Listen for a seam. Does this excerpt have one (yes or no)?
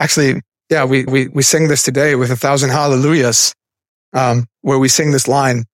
yes